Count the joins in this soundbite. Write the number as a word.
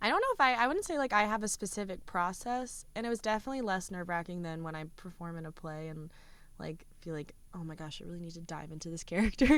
zero